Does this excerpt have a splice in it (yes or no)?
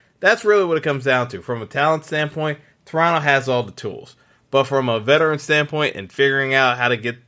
no